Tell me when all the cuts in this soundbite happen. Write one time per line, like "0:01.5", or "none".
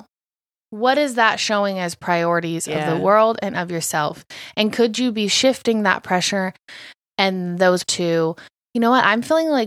0:07.8

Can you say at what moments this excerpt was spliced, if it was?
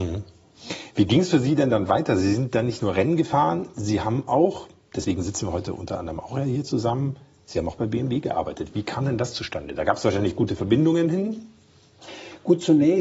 none

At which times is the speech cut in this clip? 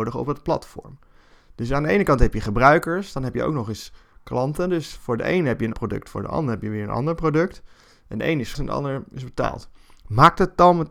0:05.7
0:08.5

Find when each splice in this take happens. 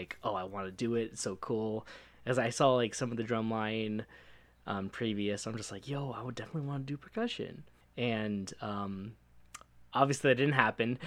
0:07.8

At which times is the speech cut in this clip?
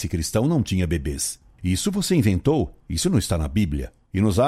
0:02.8

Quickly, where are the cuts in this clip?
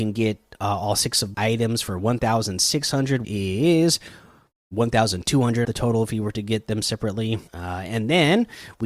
0:01.3
0:03.2
0:05.6
0:07.5

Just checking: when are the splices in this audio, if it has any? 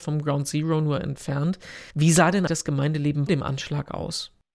0:01.9
0:02.5
0:03.3

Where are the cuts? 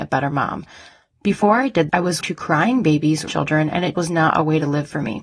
0:01.9
0:02.2
0:03.3
0:03.9

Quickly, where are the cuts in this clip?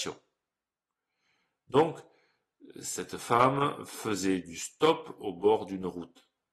none

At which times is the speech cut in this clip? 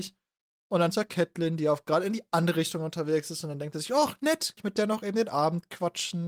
0:00.9
0:04.6

